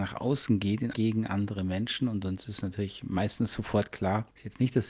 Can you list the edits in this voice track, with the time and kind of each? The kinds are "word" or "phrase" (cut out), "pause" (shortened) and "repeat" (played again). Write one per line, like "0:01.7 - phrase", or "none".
0:00.9 - word